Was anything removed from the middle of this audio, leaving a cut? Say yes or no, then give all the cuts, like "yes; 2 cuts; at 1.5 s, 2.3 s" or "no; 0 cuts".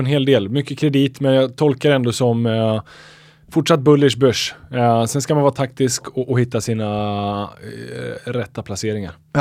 no; 0 cuts